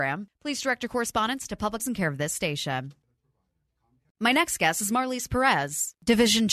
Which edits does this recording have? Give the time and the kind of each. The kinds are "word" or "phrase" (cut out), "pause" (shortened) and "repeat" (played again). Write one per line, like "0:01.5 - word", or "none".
0:01.8 - word